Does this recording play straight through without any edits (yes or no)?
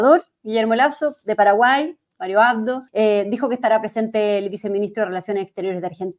no